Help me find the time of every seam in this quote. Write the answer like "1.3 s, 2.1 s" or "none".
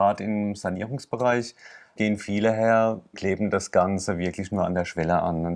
2.0 s, 3.1 s